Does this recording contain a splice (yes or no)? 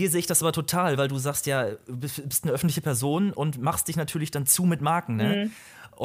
no